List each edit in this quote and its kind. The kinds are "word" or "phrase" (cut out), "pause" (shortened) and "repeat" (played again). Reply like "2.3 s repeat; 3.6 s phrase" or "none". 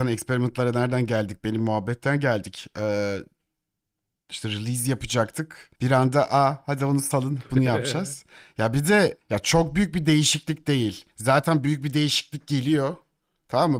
5.8 s pause; 9.2 s pause; 11.1 s pause